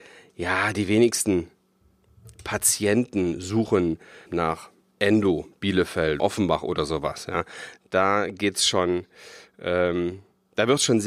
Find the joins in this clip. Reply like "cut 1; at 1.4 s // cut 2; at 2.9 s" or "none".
cut 1; at 4.3 s // cut 2; at 6.2 s